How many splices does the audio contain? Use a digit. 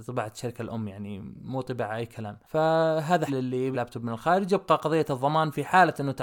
2